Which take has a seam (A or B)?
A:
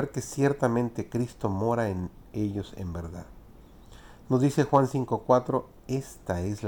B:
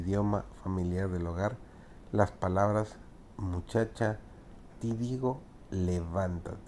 B